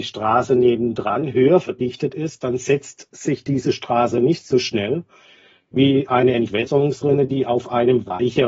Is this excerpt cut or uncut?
uncut